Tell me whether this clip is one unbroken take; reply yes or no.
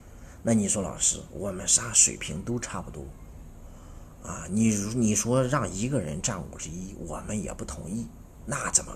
yes